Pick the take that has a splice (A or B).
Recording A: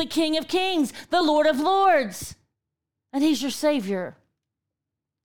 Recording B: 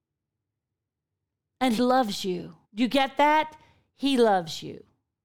B